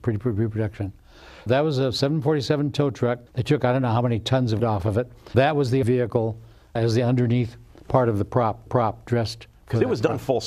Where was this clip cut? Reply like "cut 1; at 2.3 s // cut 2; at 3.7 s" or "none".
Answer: cut 1; at 1.5 s // cut 2; at 3.3 s // cut 3; at 4.6 s // cut 4; at 5.3 s // cut 5; at 5.8 s // cut 6; at 6.8 s // cut 7; at 8.7 s